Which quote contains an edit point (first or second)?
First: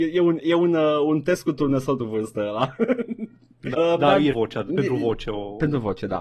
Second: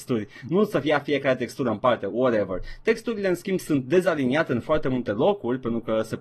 first